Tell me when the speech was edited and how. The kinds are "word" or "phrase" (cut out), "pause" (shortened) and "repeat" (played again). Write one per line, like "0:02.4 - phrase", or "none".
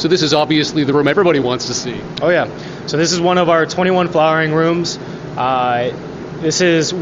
none